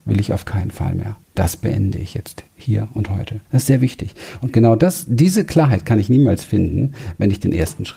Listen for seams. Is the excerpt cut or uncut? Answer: cut